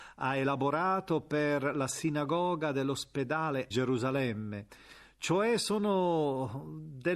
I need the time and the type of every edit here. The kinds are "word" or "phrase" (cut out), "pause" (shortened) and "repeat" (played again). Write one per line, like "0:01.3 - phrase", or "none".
0:03.7 - phrase